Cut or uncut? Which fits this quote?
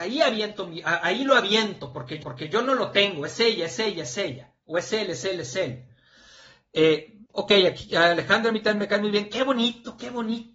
cut